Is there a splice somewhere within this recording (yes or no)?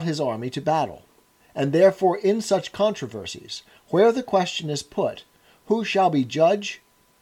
no